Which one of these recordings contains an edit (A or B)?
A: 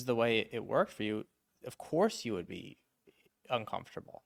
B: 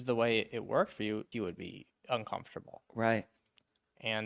B